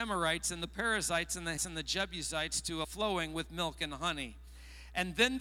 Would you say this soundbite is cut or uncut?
cut